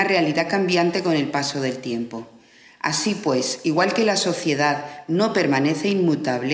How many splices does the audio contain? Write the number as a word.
zero